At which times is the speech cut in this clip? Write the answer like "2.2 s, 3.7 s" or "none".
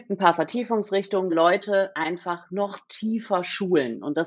1.3 s